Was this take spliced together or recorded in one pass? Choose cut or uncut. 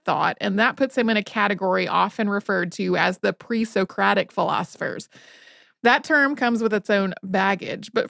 uncut